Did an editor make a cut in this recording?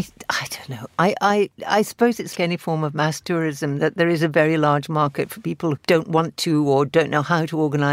yes; 2 cuts; at 2.3 s, 5.8 s

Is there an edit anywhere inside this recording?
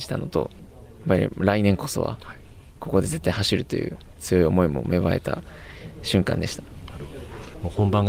yes; 1 cut; at 4.1 s

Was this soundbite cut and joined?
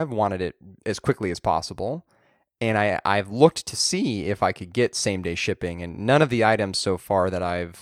no; 0 cuts

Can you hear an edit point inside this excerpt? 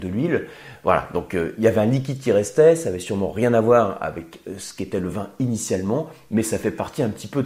no; 0 cuts

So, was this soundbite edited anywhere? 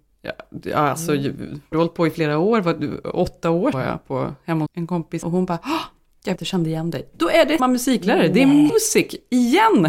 yes; 7 cuts; at 1.7 s, 3.7 s, 4.7 s, 5.2 s, 6.4 s, 7.6 s, 8.7 s

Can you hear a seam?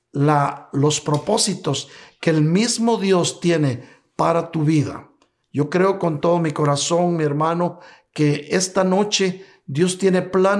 no; 0 cuts

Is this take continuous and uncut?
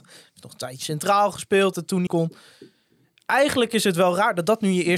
no; 2 cuts; at 1.7 s, 2.1 s

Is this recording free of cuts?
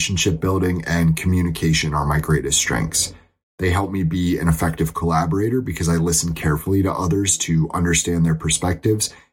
yes; 0 cuts

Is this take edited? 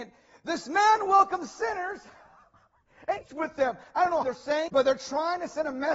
yes; 3 cuts; at 3.2 s, 4.2 s, 4.7 s

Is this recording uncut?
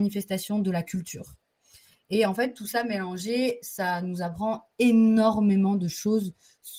yes; 0 cuts

